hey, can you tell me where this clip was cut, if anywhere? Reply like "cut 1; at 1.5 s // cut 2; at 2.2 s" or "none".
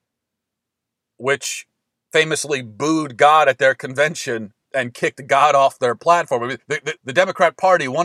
cut 1; at 6.6 s // cut 2; at 7.0 s